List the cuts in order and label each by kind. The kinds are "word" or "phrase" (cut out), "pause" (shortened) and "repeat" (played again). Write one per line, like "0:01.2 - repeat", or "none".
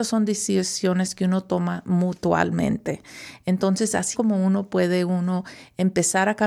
0:04.1 - word